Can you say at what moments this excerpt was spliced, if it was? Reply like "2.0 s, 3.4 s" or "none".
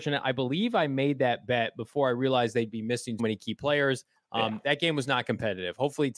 3.2 s